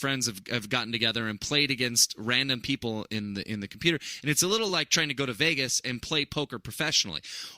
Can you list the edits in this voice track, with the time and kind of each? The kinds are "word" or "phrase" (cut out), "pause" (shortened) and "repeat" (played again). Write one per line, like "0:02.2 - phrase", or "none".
none